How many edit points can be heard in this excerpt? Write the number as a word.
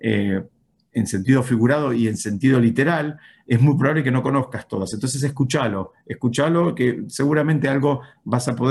zero